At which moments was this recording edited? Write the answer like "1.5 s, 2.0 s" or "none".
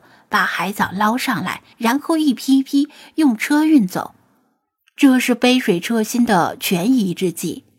1.7 s, 4.8 s